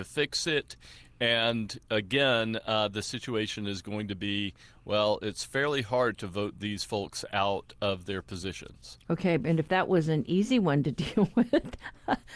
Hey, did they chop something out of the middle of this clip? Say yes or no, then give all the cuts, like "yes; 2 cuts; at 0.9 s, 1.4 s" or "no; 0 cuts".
no; 0 cuts